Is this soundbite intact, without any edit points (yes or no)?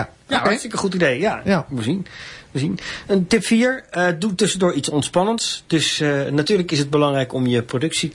yes